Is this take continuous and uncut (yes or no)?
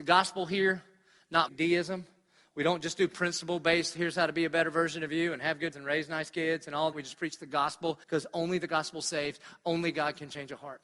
no